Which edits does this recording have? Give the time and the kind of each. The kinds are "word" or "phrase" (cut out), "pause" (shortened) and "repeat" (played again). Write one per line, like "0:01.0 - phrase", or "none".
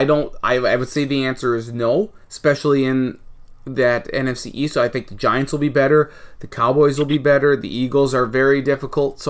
0:02.2 - pause